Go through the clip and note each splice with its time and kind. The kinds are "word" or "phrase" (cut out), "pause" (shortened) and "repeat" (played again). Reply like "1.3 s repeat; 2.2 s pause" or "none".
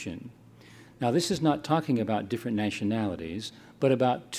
none

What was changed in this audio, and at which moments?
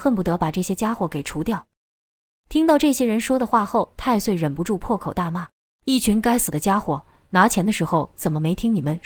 5.5 s pause

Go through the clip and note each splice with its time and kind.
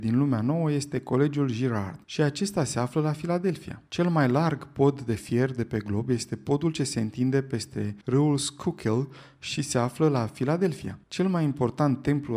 2.0 s pause; 3.9 s pause; 8.0 s pause; 11.0 s pause

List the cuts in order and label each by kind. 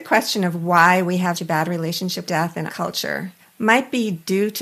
1.3 s word; 2.3 s word; 2.7 s word; 3.4 s pause

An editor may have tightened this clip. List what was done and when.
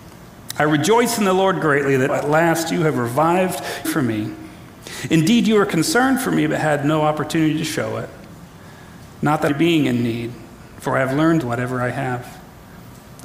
2.1 s word; 3.8 s phrase; 9.5 s phrase; 11.4 s phrase

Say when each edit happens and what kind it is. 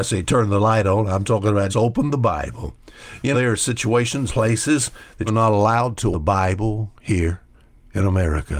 1.7 s word; 3.3 s word; 4.3 s word; 5.3 s word; 6.1 s word

